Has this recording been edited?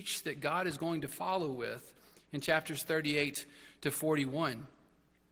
no; 0 cuts

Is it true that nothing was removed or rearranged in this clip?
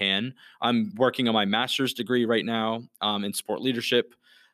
yes; 0 cuts

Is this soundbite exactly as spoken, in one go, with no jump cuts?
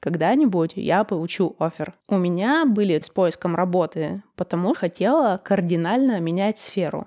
no; 3 cuts; at 2.0 s, 3.0 s, 4.8 s

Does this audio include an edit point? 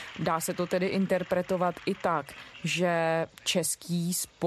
no; 0 cuts

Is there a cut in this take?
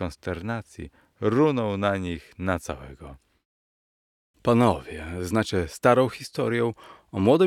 no; 0 cuts

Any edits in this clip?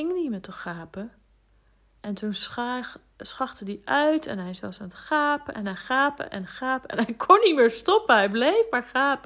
no; 0 cuts

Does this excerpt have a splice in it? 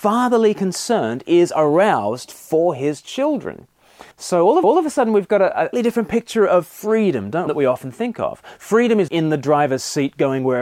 yes; 5 cuts; at 4.1 s, 4.6 s, 5.7 s, 7.5 s, 9.1 s

